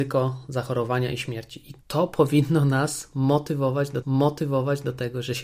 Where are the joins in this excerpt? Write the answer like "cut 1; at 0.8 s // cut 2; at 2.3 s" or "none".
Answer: cut 1; at 1.8 s // cut 2; at 4.0 s